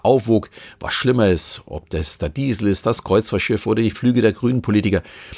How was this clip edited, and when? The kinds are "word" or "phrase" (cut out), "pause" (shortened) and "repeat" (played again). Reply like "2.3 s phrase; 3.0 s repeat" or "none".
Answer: 3.9 s word